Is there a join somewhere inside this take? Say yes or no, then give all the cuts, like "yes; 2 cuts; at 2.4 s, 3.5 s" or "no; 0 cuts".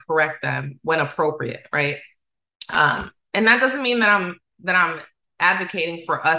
no; 0 cuts